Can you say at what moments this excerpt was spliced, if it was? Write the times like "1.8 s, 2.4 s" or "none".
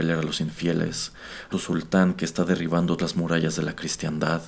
1.5 s, 3.0 s